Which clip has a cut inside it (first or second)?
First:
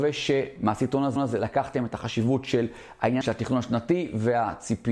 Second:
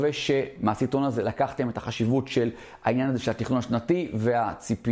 first